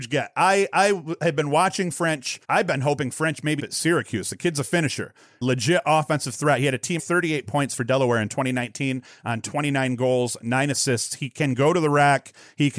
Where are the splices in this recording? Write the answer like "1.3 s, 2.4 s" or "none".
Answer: 2.4 s, 3.6 s, 5.4 s, 7.0 s